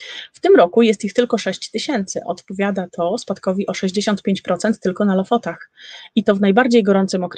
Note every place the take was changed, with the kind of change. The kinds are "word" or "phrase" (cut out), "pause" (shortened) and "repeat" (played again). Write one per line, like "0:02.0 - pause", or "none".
none

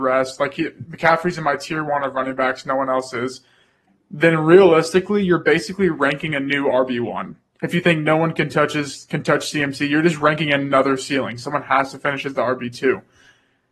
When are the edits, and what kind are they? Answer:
none

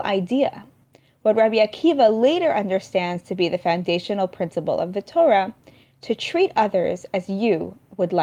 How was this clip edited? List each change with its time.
none

